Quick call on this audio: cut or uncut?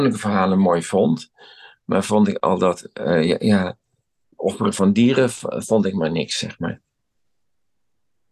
uncut